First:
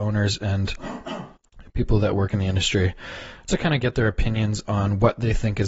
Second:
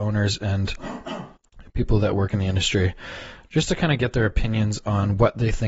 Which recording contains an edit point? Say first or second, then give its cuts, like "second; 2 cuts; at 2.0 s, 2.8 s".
first; 1 cut; at 3.5 s